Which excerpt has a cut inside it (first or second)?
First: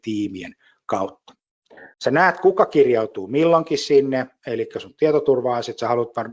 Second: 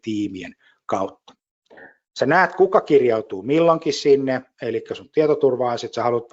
first